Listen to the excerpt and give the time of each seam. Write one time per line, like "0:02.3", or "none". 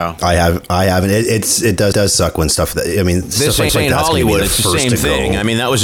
0:01.9
0:02.7
0:03.7